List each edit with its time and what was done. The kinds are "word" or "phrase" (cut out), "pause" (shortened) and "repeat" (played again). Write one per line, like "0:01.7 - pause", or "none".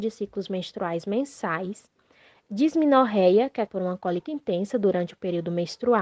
0:03.7 - word
0:04.3 - word

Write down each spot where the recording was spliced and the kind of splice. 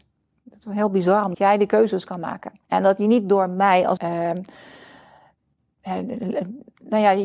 0:01.3 - phrase
0:02.6 - pause
0:04.0 - word

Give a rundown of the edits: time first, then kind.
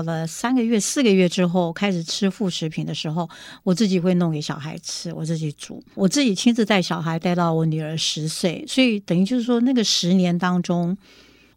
0:05.9 - pause

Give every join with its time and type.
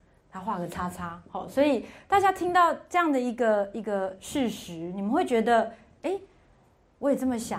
none

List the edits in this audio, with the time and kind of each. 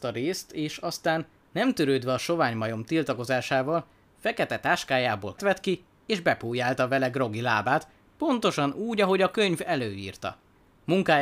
0:05.4 - word

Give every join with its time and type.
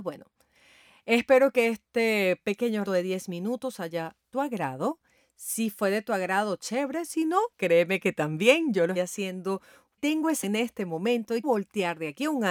0:02.8 - word
0:04.3 - phrase
0:07.5 - pause
0:09.0 - word
0:10.0 - word
0:10.4 - word
0:11.4 - word

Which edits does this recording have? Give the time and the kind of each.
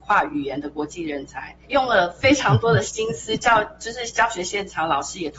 0:01.6 - pause

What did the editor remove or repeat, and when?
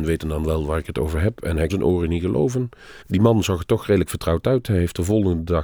0:01.7 - word
0:03.0 - pause

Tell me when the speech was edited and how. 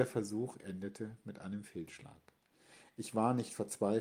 none

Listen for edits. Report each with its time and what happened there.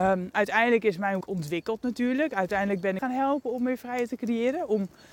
0:01.2 - phrase
0:03.0 - phrase

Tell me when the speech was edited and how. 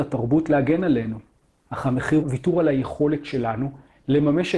0:01.4 - pause
0:02.2 - phrase

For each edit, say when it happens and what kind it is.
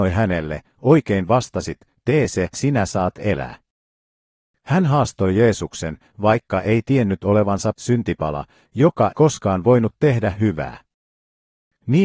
0:02.5 - word
0:07.7 - word
0:09.1 - word

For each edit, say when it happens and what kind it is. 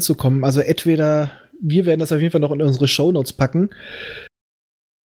none

